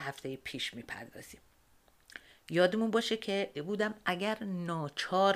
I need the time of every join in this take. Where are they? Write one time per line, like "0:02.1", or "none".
0:03.5